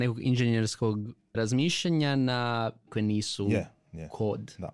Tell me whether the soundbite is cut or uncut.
cut